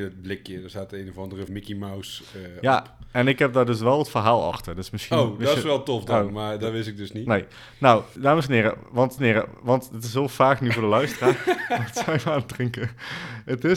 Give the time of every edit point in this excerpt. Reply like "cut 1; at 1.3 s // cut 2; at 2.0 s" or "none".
cut 1; at 1.5 s // cut 2; at 8.2 s // cut 3; at 9.2 s

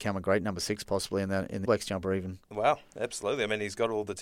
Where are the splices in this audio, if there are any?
cut 1; at 1.7 s

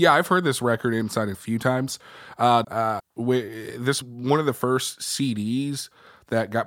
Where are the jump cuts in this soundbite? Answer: cut 1; at 1.3 s // cut 2; at 2.6 s // cut 3; at 3.0 s // cut 4; at 4.0 s

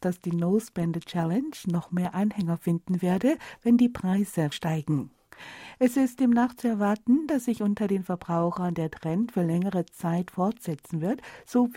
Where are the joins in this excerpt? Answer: cut 1; at 4.5 s

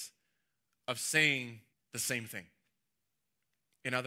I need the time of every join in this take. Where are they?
cut 1; at 1.7 s

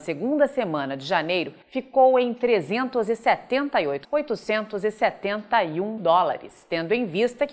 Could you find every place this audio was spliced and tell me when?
cut 1; at 1.6 s // cut 2; at 4.0 s // cut 3; at 6.0 s

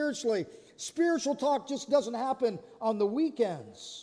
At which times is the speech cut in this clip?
none

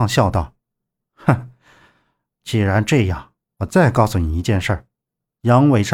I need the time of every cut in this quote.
none

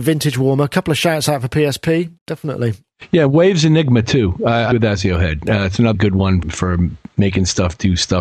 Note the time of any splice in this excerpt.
cut 1; at 2.2 s // cut 2; at 4.7 s // cut 3; at 5.9 s // cut 4; at 6.4 s

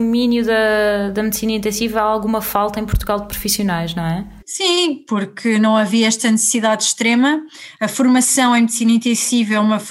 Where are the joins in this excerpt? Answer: cut 1; at 4.4 s

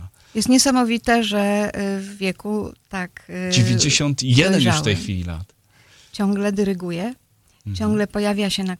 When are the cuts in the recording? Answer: none

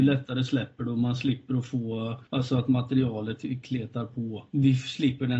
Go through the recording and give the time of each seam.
none

